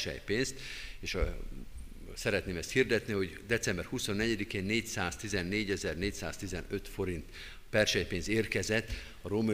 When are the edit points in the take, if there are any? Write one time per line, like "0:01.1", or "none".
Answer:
none